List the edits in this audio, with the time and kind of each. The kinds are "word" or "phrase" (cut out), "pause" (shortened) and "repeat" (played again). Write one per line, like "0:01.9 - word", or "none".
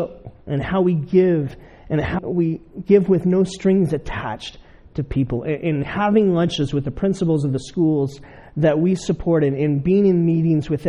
0:02.2 - word